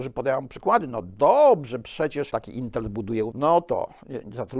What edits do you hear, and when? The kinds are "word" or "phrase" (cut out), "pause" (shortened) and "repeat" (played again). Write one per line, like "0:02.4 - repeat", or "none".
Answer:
0:02.3 - word
0:03.3 - phrase